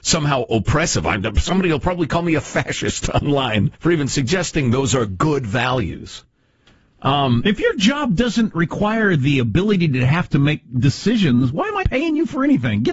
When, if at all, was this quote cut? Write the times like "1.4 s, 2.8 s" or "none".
3.7 s, 11.8 s